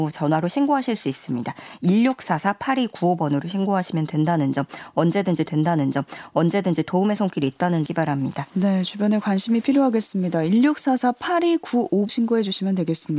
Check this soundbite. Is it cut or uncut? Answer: cut